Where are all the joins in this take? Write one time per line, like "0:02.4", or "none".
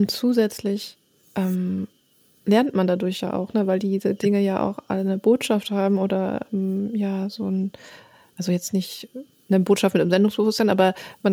none